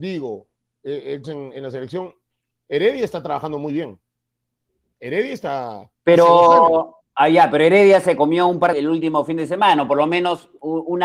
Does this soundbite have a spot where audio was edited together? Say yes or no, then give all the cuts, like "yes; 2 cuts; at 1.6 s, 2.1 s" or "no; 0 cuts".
yes; 3 cuts; at 1.2 s, 5.9 s, 8.7 s